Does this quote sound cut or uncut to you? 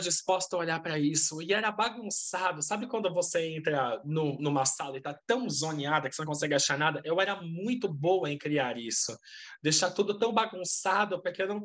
uncut